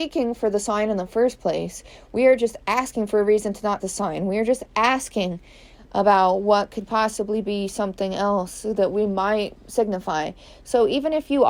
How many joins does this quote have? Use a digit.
1